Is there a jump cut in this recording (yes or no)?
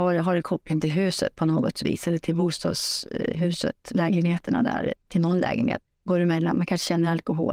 yes